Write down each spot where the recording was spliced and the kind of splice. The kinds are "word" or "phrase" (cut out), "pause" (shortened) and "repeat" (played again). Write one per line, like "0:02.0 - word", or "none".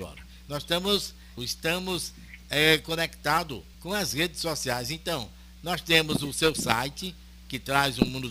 0:01.4 - word
0:03.7 - pause